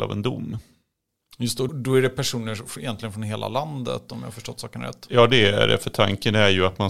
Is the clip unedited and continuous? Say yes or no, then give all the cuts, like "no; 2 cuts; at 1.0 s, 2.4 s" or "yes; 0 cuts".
no; 1 cut; at 1.7 s